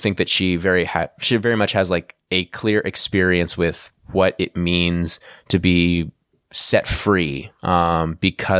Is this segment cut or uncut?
uncut